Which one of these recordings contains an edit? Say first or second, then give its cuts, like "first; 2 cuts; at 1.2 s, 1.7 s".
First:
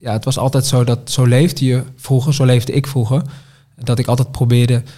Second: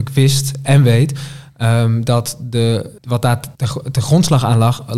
second; 2 cuts; at 3.0 s, 3.5 s